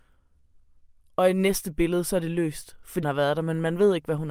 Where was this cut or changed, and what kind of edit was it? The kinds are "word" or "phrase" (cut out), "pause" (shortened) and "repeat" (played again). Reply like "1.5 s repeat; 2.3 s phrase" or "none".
3.0 s word

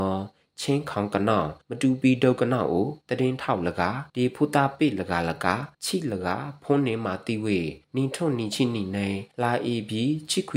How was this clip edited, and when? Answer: 1.6 s pause; 3.0 s pause; 4.1 s pause; 5.7 s pause; 7.8 s pause; 9.3 s pause

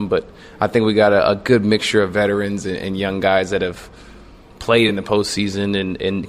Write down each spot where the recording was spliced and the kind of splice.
none

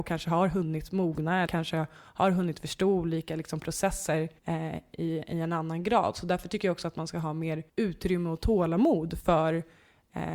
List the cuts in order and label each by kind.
1.5 s word; 4.4 s pause; 7.7 s pause

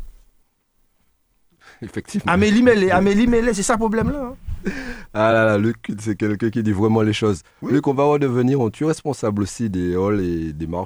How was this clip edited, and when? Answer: none

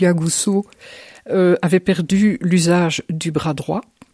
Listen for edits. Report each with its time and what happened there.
none

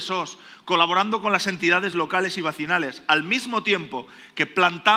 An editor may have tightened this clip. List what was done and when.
none

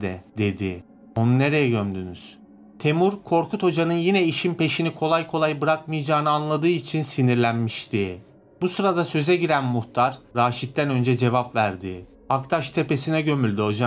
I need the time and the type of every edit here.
none

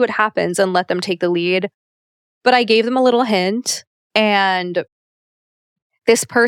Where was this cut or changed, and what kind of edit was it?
none

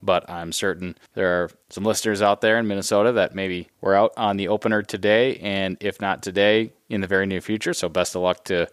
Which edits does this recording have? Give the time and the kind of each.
none

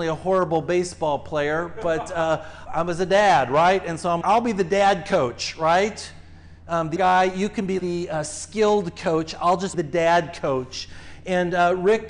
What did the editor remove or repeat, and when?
2.7 s word; 4.2 s word; 7.0 s word; 7.8 s word; 9.7 s word

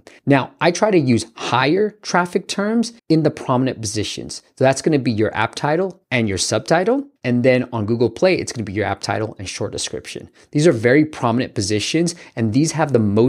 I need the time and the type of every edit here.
3.0 s pause; 7.2 s pause

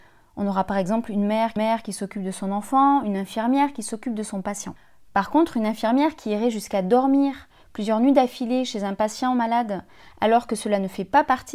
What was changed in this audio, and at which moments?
1.6 s repeat

